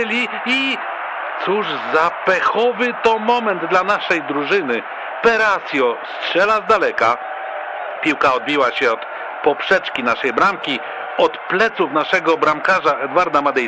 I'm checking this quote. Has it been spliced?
no; 0 cuts

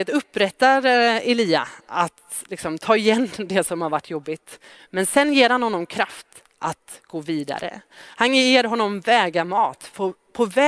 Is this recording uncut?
yes; 0 cuts

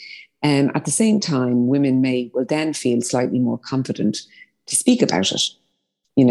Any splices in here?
no; 0 cuts

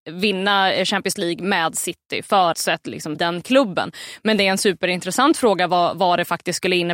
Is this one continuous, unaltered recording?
no; 2 cuts; at 2.5 s, 3.1 s

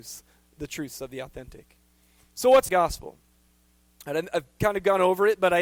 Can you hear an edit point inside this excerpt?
yes; 1 cut; at 2.7 s

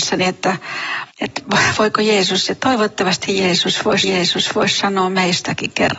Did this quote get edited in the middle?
yes; 2 cuts; at 1.1 s, 4.0 s

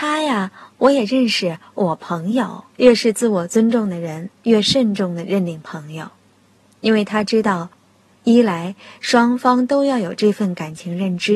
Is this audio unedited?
no; 2 cuts; at 2.7 s, 4.4 s

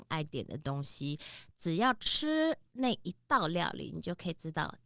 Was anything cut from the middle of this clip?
yes; 1 cut; at 1.5 s

